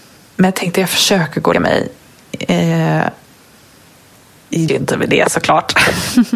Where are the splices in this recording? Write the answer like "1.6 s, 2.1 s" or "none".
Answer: 1.5 s, 4.7 s